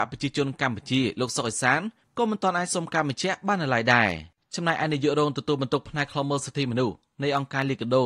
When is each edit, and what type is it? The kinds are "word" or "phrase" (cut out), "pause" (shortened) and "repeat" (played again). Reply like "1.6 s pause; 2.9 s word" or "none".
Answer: 4.3 s pause